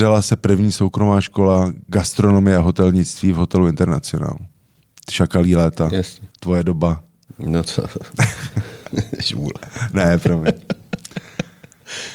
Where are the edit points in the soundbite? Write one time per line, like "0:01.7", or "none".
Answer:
0:06.3